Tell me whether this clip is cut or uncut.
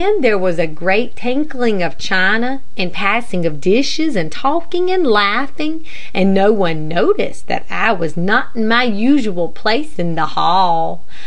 uncut